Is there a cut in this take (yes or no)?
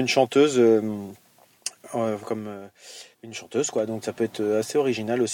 yes